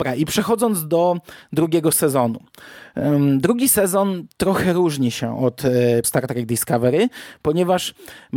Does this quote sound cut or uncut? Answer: cut